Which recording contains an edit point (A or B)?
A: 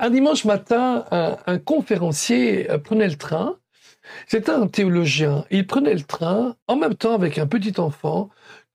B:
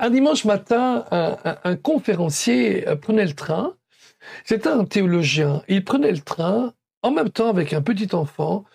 A